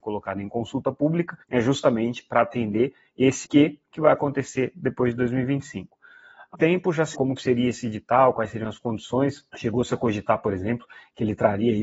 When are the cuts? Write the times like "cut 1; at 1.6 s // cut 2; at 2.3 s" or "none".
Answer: cut 1; at 1.4 s // cut 2; at 3.4 s // cut 3; at 6.5 s // cut 4; at 7.1 s // cut 5; at 9.5 s